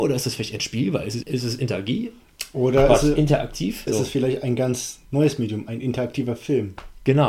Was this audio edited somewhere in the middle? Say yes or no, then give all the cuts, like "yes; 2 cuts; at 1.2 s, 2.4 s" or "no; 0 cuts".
yes; 3 cuts; at 1.2 s, 3.9 s, 5.0 s